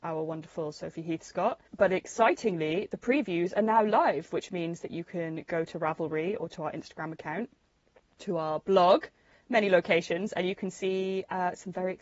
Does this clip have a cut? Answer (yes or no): yes